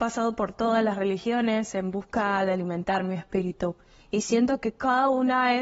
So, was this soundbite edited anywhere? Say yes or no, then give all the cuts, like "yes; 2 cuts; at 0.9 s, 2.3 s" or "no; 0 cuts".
no; 0 cuts